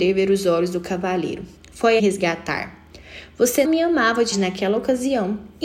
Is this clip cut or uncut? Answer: cut